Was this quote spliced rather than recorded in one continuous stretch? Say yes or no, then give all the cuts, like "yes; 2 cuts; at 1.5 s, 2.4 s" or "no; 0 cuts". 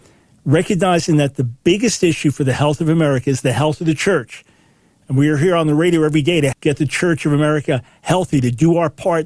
yes; 1 cut; at 6.5 s